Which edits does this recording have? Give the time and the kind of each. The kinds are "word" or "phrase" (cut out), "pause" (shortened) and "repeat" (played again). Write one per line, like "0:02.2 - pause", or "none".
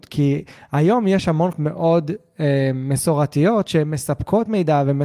0:01.5 - word